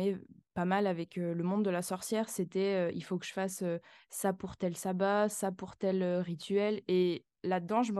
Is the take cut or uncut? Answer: uncut